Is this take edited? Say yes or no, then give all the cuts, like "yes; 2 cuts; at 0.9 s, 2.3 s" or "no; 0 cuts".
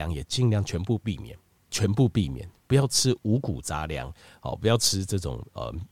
yes; 1 cut; at 1.7 s